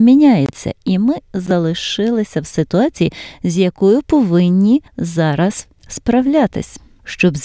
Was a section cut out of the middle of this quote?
yes; 1 cut; at 4.9 s

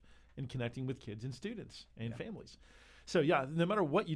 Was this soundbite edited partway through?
no; 0 cuts

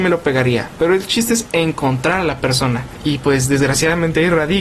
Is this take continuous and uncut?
yes; 0 cuts

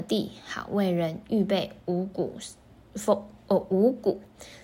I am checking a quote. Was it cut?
no; 0 cuts

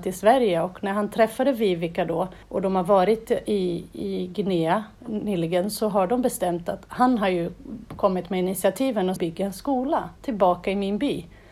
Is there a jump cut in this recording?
yes; 4 cuts; at 2.4 s, 4.9 s, 9.2 s, 10.2 s

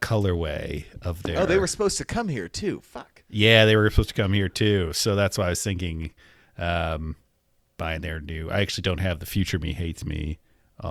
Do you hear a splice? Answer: no; 0 cuts

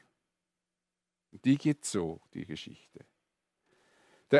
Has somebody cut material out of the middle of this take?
no; 0 cuts

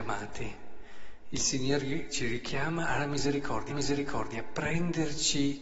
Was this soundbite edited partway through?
yes; 1 cut; at 3.7 s

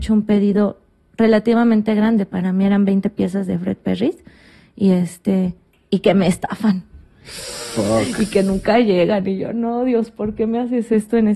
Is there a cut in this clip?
no; 0 cuts

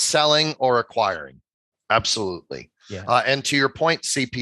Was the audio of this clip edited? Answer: no; 0 cuts

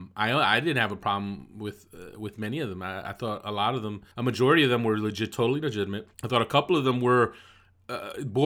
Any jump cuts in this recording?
yes; 2 cuts; at 4.1 s, 6.1 s

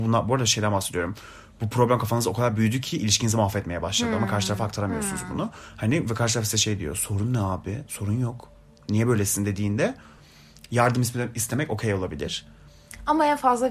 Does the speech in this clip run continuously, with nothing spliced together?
yes; 0 cuts

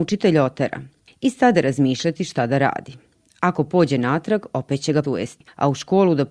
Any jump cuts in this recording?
yes; 1 cut; at 5.0 s

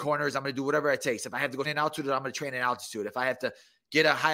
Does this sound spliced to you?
yes; 1 cut; at 1.6 s

